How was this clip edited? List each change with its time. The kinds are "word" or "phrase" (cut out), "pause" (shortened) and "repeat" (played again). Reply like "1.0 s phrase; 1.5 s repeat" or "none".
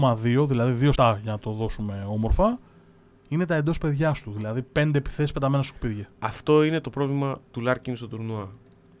1.0 s word; 6.1 s pause